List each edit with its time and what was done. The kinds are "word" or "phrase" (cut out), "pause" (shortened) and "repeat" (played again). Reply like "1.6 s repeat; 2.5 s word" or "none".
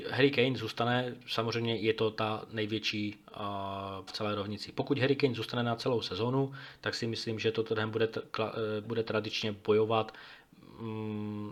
4.1 s word; 8.8 s word